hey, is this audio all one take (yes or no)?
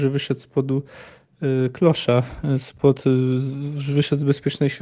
yes